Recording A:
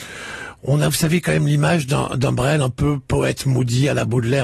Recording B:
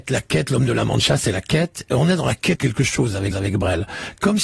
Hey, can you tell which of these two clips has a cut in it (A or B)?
B